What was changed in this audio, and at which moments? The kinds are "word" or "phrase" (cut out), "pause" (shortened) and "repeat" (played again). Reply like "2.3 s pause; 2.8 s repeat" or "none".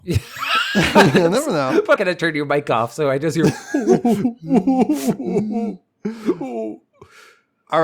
2.0 s phrase